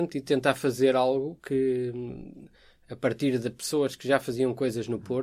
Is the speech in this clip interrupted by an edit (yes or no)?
no